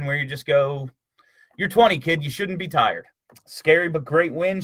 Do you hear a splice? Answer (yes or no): no